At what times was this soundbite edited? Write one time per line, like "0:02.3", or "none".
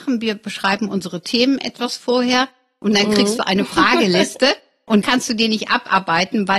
0:05.0

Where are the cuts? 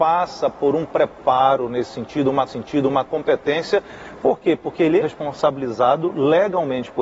0:02.5
0:05.0

